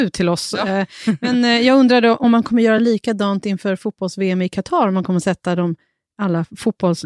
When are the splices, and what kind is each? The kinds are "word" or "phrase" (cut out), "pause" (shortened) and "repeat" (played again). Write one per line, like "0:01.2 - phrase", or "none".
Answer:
none